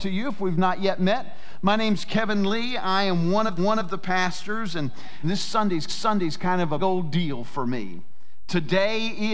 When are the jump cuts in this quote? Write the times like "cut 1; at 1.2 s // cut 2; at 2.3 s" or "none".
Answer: cut 1; at 3.6 s // cut 2; at 5.2 s // cut 3; at 5.9 s // cut 4; at 6.8 s